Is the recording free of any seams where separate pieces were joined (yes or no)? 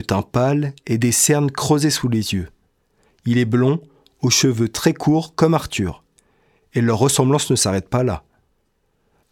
yes